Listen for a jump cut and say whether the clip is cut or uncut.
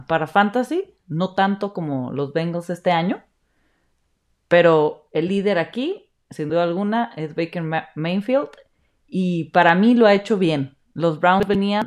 uncut